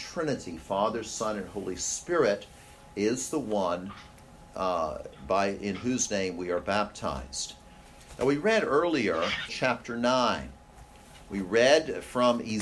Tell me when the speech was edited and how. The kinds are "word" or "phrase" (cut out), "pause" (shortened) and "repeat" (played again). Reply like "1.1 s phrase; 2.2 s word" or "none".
9.5 s phrase